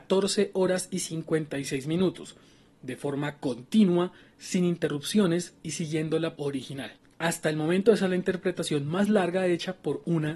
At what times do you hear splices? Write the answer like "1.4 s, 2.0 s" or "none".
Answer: 6.4 s